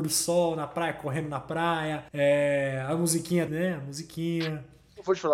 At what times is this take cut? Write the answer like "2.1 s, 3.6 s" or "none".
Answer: 2.1 s, 3.5 s